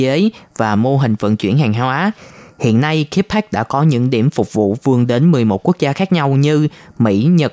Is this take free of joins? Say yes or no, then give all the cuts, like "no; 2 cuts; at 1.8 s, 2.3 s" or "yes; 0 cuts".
yes; 0 cuts